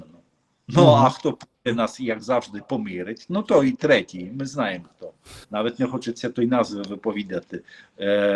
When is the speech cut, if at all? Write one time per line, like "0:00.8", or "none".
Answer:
0:05.4